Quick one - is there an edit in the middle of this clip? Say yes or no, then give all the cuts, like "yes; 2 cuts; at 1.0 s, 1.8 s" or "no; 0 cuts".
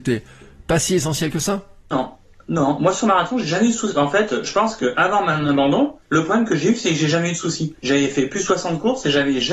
yes; 3 cuts; at 1.8 s, 6.0 s, 7.8 s